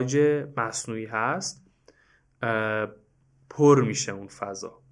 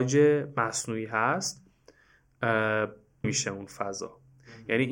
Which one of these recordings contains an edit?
second; 1 cut; at 3.2 s

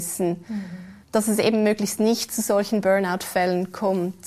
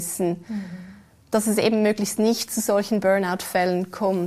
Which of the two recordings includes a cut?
first; 1 cut; at 1.0 s

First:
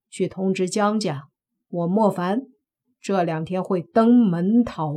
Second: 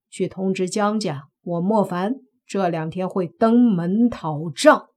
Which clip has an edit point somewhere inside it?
second; 2 cuts; at 1.4 s, 2.3 s

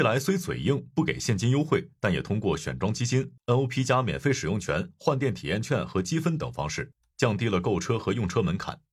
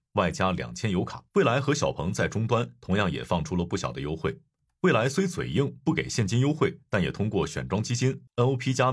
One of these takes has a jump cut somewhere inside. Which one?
second; 1 cut; at 1.3 s

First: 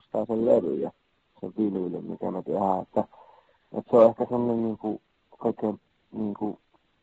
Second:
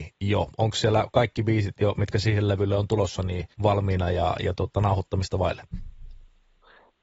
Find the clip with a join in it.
second; 1 cut; at 3.5 s

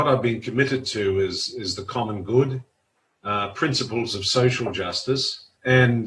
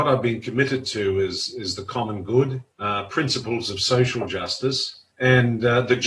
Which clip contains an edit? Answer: second; 1 cut; at 2.7 s

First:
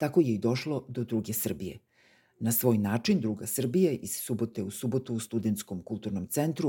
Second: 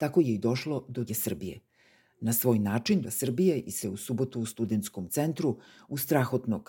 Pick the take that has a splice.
second; 4 cuts; at 1.1 s, 3.0 s, 3.8 s, 5.1 s

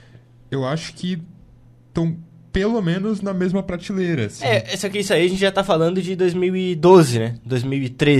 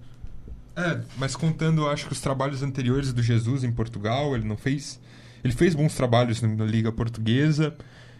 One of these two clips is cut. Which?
second; 1 cut; at 1.1 s

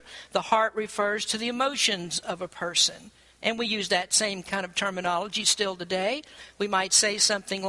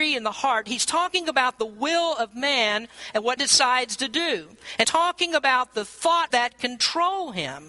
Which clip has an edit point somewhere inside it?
second; 3 cuts; at 3.4 s, 4.8 s, 6.3 s

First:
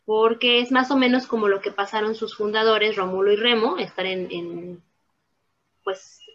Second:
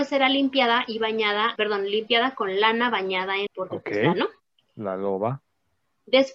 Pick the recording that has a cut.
second; 3 cuts; at 1.6 s, 3.5 s, 4.1 s

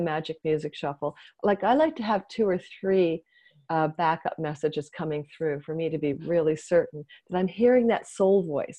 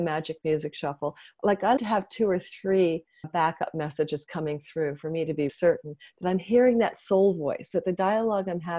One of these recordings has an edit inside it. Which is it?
second; 3 cuts; at 1.8 s, 3.2 s, 5.5 s

